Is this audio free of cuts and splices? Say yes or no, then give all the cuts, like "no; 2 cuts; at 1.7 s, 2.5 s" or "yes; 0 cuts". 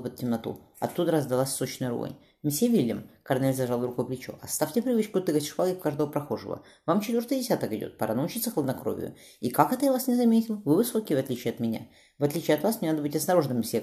yes; 0 cuts